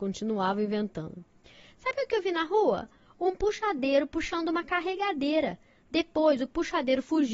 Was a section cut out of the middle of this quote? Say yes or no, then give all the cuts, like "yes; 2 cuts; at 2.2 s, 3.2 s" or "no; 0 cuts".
no; 0 cuts